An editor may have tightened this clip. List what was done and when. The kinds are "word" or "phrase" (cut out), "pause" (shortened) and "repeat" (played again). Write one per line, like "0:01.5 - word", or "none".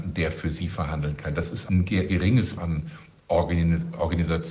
0:01.7 - word
0:02.1 - word
0:02.6 - word